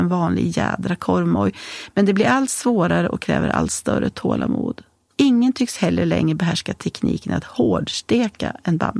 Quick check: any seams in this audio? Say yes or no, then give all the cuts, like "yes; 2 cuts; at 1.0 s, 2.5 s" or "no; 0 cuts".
no; 0 cuts